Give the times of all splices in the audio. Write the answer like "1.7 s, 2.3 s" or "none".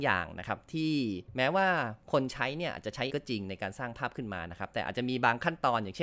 3.1 s